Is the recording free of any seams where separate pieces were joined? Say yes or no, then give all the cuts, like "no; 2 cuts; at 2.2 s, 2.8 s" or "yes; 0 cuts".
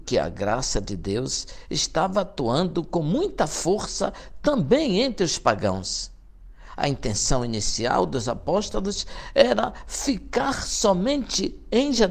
yes; 0 cuts